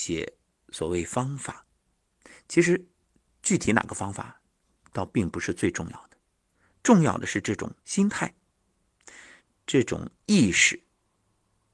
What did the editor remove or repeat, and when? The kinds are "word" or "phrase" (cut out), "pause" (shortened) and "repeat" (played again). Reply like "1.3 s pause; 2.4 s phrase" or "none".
7.8 s pause